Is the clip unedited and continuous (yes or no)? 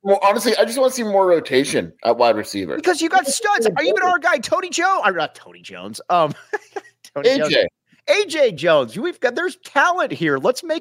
yes